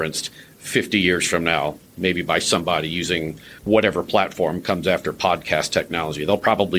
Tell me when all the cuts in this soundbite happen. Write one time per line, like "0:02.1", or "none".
0:03.6